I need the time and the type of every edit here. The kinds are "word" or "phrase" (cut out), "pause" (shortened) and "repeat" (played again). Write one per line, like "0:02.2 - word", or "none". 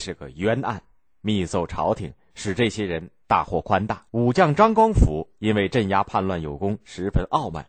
0:04.1 - pause